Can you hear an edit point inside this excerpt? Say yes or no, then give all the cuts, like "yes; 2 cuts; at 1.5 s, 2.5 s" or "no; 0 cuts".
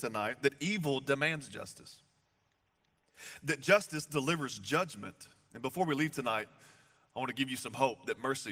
no; 0 cuts